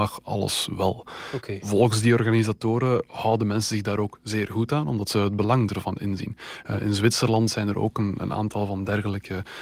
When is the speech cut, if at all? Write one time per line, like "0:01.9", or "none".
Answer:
none